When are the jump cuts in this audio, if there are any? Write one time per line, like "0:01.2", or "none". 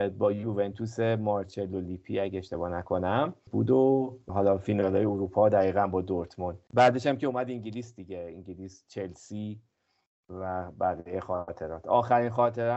none

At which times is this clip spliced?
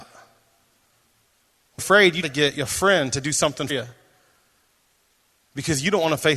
0:01.8
0:02.2
0:03.7

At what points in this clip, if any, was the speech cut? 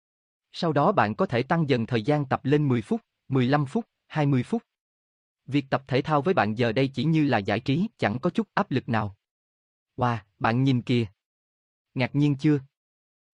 0:07.9

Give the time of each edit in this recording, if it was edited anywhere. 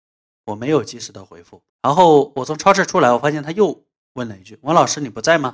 0:01.7

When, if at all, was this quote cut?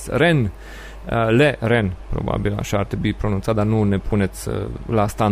none

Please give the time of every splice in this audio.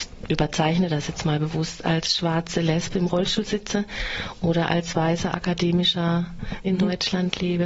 0:06.6

